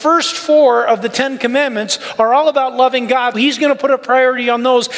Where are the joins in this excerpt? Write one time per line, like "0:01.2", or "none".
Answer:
0:03.3